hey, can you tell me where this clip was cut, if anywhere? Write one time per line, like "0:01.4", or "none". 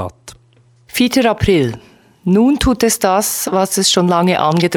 none